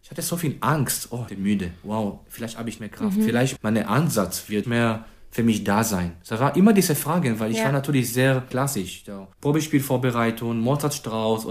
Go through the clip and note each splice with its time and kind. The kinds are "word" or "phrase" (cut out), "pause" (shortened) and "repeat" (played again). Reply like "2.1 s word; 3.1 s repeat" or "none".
1.3 s phrase; 2.8 s word; 3.6 s word; 4.6 s word; 9.3 s pause